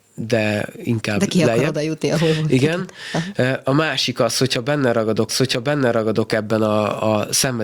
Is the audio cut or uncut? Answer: cut